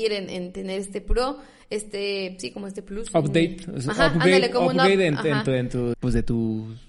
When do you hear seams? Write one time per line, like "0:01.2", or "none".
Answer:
0:05.9